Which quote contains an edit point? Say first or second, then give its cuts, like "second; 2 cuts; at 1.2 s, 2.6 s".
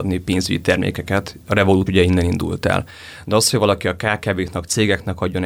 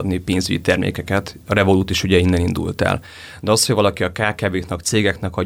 first; 1 cut; at 1.9 s